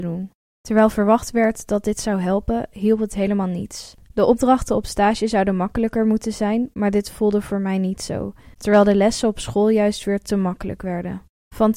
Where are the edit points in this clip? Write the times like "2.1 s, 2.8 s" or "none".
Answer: 8.5 s